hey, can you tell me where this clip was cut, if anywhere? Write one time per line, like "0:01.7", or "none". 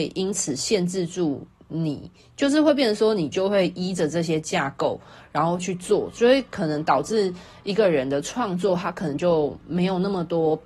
none